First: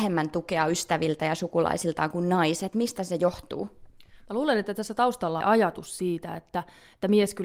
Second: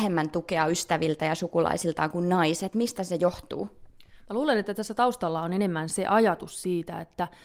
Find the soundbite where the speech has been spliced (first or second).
first